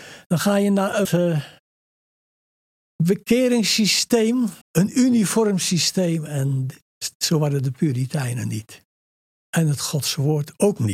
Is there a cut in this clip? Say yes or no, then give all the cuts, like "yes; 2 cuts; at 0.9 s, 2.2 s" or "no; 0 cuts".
yes; 2 cuts; at 1.0 s, 4.6 s